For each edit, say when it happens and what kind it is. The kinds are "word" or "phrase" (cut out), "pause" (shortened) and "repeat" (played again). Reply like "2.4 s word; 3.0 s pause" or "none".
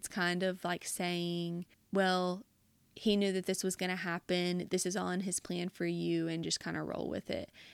none